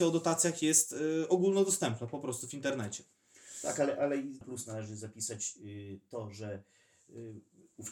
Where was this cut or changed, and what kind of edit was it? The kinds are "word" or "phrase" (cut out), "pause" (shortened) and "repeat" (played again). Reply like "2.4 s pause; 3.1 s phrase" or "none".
4.4 s phrase

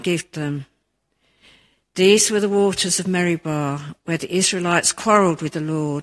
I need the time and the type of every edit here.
none

